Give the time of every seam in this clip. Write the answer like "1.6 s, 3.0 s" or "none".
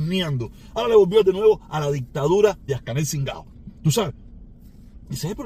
1.2 s, 2.7 s